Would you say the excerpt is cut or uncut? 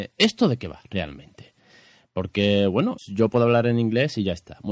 cut